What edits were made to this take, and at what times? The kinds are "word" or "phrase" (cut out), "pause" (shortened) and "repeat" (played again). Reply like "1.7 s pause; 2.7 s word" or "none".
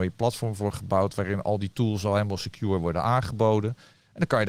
none